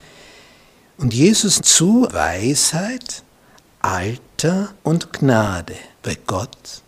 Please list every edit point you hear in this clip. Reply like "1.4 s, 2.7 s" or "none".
1.6 s, 2.1 s, 4.8 s, 5.9 s